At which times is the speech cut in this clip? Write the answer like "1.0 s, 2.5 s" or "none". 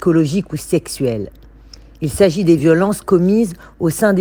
none

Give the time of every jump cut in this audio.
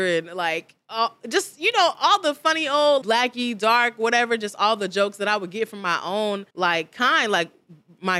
3.0 s, 6.5 s

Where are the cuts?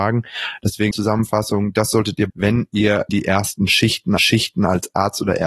0.9 s, 2.3 s, 3.1 s, 4.2 s

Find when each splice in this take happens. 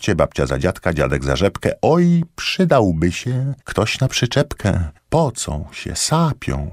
3.6 s, 5.0 s

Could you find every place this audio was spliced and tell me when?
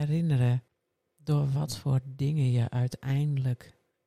none

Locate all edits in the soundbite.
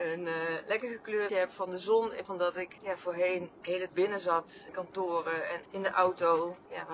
1.3 s, 2.2 s, 3.9 s, 4.7 s

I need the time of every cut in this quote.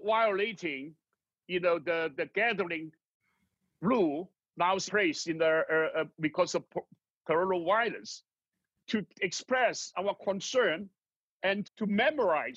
2.1 s, 4.9 s, 11.6 s

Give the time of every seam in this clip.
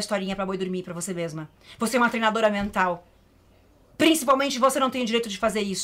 none

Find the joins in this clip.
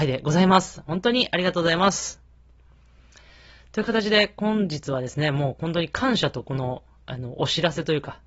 none

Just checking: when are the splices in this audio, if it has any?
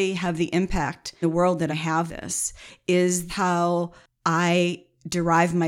1.2 s, 1.7 s, 2.1 s, 3.3 s

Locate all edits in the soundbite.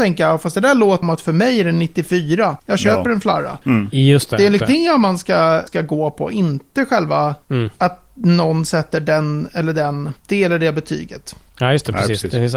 1.0 s, 2.6 s, 3.6 s, 4.6 s, 5.7 s, 7.4 s, 10.2 s

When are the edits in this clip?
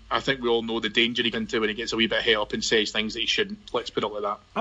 1.3 s

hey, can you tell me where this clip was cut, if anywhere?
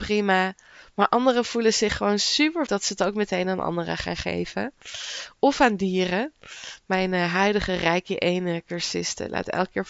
2.7 s

